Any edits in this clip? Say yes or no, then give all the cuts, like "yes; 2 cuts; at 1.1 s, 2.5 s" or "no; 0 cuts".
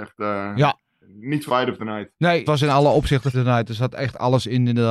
yes; 3 cuts; at 1.5 s, 2.5 s, 3.3 s